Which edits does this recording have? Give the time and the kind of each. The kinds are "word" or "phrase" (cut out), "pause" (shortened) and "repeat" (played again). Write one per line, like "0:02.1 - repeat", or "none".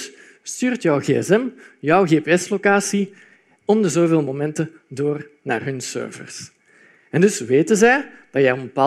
none